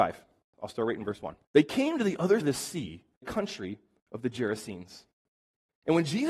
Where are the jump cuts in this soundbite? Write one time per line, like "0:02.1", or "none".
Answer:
0:01.4
0:02.4
0:03.2